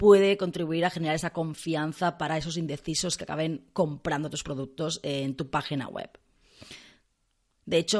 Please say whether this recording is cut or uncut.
uncut